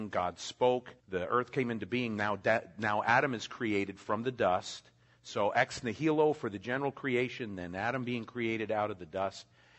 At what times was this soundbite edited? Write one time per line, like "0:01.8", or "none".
0:01.0